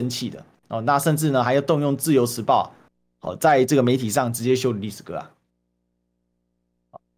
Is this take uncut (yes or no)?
yes